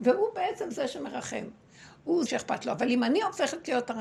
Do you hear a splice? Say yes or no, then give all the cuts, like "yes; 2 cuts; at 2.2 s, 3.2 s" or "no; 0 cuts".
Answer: yes; 1 cut; at 2.3 s